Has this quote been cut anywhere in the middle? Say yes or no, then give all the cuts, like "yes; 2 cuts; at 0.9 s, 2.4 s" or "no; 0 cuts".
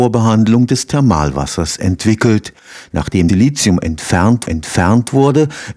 yes; 2 cuts; at 3.3 s, 4.5 s